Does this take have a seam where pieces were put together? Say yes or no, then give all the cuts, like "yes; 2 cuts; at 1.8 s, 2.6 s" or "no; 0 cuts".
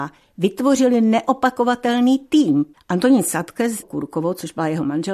yes; 2 cuts; at 2.7 s, 3.8 s